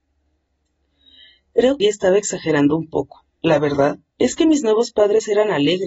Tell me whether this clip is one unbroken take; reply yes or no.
no